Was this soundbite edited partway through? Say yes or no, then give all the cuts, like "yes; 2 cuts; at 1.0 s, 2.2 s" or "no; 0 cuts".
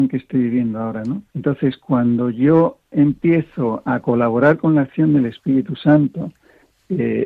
yes; 1 cut; at 1.3 s